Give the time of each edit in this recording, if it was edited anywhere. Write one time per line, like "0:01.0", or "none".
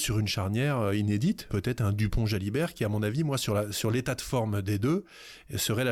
0:01.5